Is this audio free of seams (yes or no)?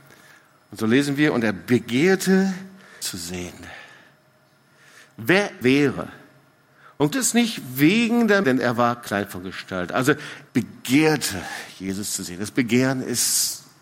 no